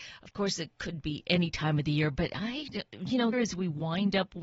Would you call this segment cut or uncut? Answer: cut